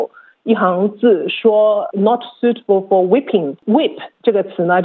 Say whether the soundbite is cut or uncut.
cut